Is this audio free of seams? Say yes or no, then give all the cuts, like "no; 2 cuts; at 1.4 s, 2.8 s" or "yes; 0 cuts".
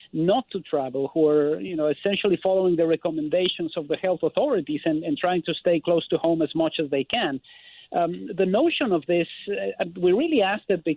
yes; 0 cuts